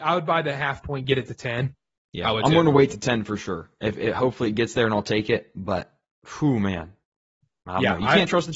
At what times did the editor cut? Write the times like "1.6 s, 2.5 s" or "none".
none